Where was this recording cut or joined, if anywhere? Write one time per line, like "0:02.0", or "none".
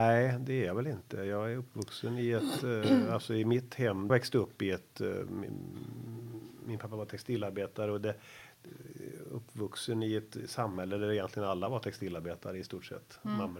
0:04.1